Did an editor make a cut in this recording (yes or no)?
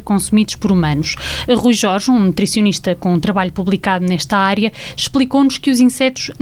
no